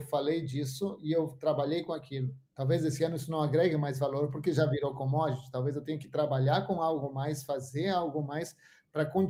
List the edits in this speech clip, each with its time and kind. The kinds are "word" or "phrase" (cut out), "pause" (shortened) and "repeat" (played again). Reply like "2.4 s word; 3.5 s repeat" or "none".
2.5 s pause